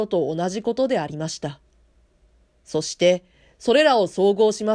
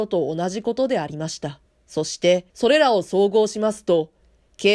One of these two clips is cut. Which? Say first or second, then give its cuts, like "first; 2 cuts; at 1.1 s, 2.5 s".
second; 2 cuts; at 1.7 s, 2.5 s